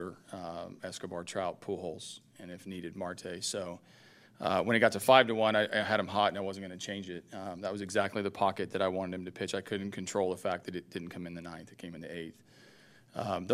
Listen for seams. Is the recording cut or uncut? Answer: uncut